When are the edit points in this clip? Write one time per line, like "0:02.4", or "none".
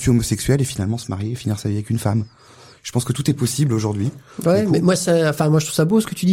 none